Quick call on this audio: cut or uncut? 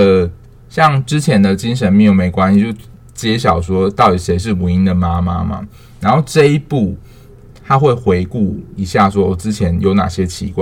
uncut